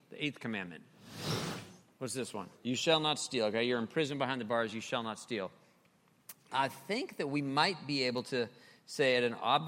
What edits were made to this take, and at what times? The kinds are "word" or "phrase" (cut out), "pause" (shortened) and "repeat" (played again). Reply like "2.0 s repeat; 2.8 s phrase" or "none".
2.5 s pause